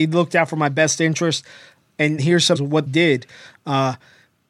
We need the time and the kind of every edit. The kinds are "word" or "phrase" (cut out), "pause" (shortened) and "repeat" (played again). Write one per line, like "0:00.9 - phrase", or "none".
0:02.2 - word
0:02.6 - word
0:02.9 - word